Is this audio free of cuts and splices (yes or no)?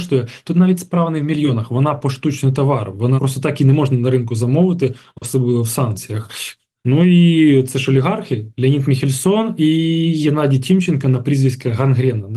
no